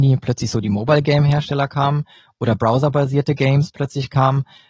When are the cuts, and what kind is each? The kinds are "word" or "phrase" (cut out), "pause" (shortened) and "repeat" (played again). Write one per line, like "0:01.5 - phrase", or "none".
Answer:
none